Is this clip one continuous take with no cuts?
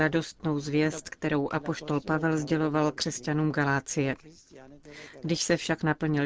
yes; 0 cuts

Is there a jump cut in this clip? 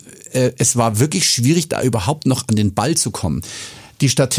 no; 0 cuts

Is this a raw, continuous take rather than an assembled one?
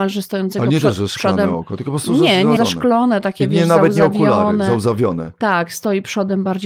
no; 1 cut; at 2.6 s

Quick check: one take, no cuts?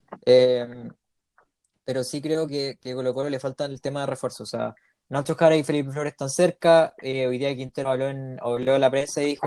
yes; 0 cuts

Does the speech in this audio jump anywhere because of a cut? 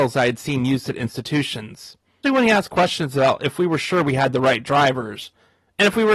yes; 1 cut; at 2.2 s

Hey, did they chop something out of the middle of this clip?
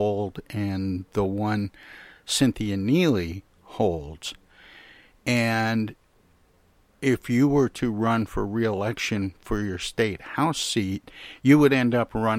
no; 0 cuts

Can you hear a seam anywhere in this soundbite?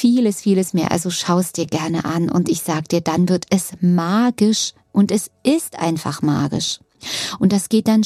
no; 0 cuts

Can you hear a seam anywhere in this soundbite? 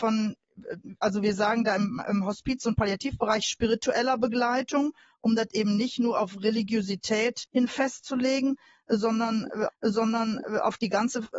yes; 2 cuts; at 7.5 s, 9.7 s

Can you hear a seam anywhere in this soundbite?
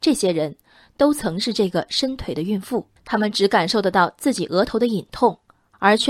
yes; 1 cut; at 3.0 s

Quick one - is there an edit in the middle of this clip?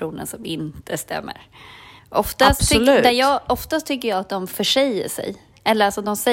yes; 1 cut; at 2.0 s

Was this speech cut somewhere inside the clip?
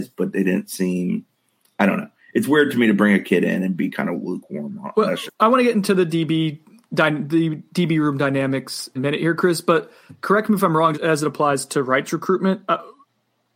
yes; 3 cuts; at 5.3 s, 9.0 s, 10.9 s

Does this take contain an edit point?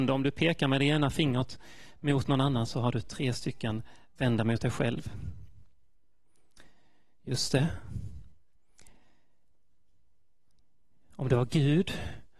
no; 0 cuts

